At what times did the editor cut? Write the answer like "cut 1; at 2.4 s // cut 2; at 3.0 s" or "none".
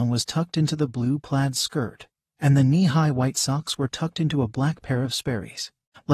none